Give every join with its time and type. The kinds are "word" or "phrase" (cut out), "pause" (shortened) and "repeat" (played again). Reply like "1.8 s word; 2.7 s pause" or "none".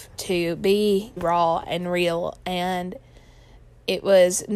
1.2 s word